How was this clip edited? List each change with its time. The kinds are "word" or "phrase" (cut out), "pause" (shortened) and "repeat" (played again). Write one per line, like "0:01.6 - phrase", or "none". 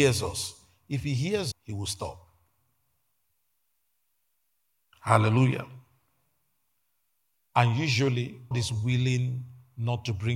0:01.5 - word
0:08.5 - word